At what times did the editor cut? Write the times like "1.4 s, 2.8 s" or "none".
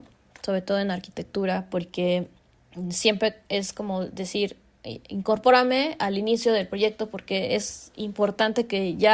none